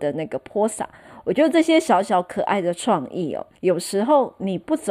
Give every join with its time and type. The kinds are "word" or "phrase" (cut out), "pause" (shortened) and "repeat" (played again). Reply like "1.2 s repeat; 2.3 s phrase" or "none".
3.6 s pause